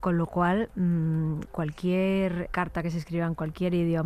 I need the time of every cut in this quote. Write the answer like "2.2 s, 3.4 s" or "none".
2.5 s

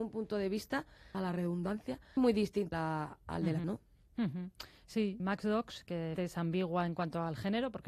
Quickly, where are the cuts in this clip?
1.1 s, 2.2 s, 2.7 s, 3.6 s, 5.2 s, 6.1 s

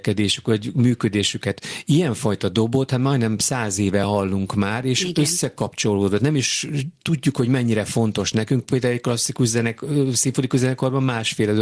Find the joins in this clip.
none

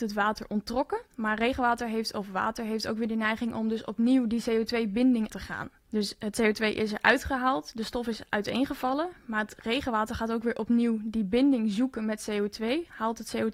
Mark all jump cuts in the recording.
1.1 s, 5.3 s, 5.8 s

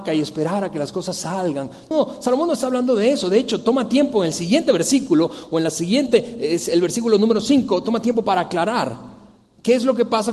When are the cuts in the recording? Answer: 1.9 s

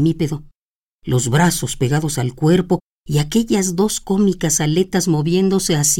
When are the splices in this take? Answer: none

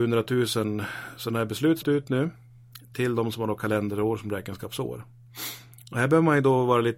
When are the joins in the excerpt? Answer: 1.8 s

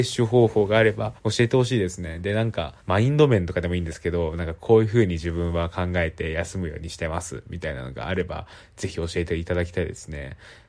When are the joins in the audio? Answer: 1.2 s, 2.8 s

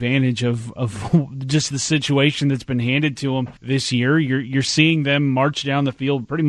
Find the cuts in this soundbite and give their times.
3.6 s

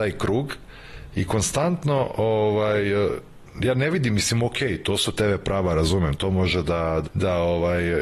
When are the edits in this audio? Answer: 7.0 s

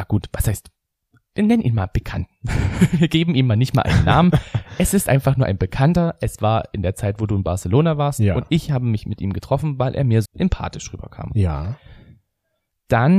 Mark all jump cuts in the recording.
10.3 s

